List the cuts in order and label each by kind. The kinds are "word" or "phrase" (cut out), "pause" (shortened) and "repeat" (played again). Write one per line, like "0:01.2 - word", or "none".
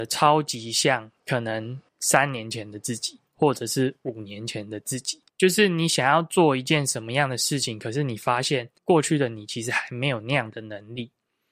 0:01.2 - pause
0:01.9 - pause
0:03.3 - pause
0:05.3 - pause
0:08.8 - pause

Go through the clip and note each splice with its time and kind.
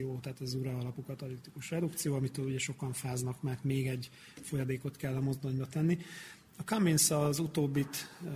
none

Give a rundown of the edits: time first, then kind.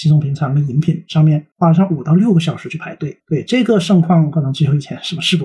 0:01.5 - pause
0:03.2 - word

